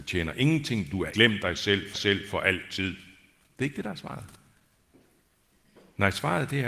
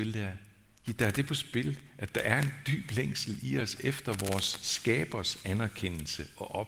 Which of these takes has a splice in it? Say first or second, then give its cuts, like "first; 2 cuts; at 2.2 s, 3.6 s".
first; 2 cuts; at 1.1 s, 1.9 s